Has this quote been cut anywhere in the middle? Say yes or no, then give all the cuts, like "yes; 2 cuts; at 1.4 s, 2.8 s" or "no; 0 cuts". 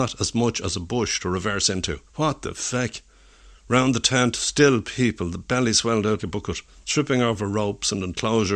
yes; 3 cuts; at 2.1 s, 6.2 s, 6.7 s